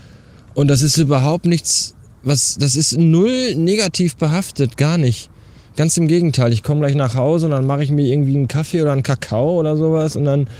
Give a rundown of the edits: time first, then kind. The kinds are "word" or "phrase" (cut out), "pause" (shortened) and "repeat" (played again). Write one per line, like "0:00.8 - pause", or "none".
none